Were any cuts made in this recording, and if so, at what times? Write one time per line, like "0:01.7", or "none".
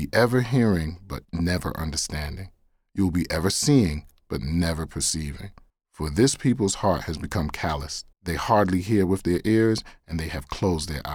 0:05.7
0:08.1